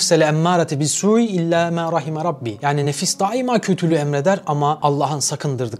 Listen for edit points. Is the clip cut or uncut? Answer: uncut